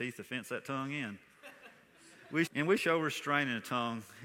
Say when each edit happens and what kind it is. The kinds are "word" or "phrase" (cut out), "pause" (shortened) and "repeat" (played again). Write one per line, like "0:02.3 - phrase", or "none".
0:02.5 - word
0:02.8 - word